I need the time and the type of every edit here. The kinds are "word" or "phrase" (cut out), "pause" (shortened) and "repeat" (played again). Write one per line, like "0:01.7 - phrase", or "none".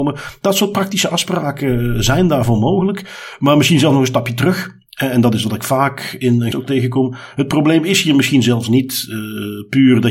0:06.5 - word